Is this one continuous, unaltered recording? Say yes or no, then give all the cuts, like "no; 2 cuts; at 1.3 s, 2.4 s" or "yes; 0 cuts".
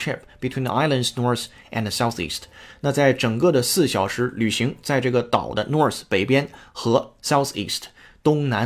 yes; 0 cuts